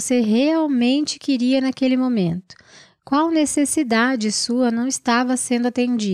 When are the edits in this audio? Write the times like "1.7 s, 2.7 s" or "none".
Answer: none